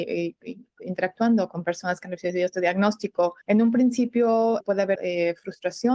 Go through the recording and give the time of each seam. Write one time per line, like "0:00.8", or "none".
0:03.4
0:04.6
0:05.0